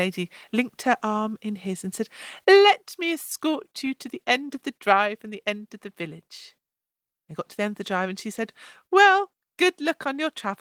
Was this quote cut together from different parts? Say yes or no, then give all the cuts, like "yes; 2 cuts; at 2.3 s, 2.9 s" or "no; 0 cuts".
no; 0 cuts